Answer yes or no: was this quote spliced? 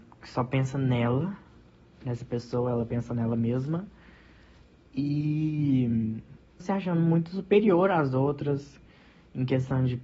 yes